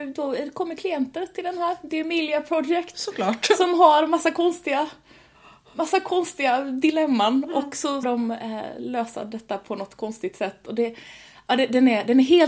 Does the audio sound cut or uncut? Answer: cut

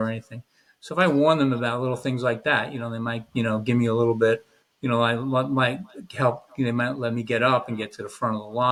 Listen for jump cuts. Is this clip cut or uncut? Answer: cut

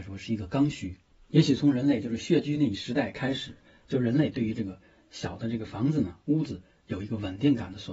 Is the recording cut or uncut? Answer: uncut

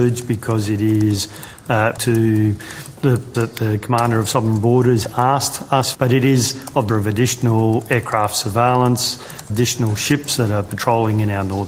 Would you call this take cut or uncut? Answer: cut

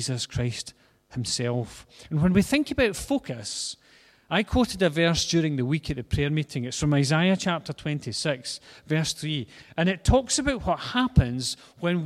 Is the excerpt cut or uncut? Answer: uncut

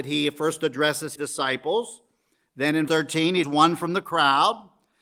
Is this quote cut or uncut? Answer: cut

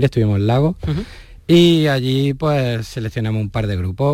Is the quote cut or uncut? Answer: uncut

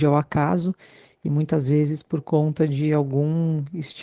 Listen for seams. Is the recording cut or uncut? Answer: uncut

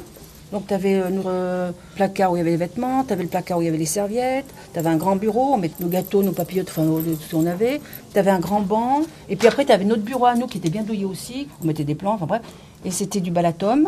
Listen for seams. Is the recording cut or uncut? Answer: cut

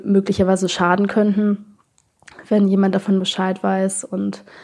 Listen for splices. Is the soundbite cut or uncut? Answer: uncut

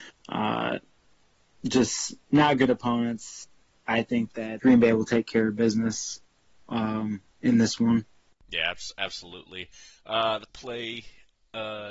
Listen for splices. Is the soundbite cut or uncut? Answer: cut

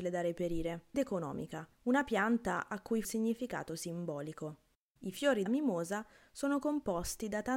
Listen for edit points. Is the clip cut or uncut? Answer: cut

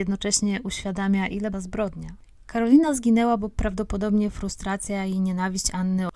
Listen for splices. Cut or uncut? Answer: cut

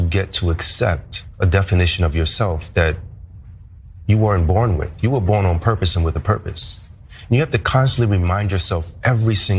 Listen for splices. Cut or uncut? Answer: uncut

